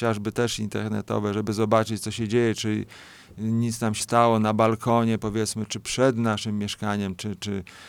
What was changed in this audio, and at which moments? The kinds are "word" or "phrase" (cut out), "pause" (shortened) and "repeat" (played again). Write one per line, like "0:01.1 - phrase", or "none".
0:04.0 - word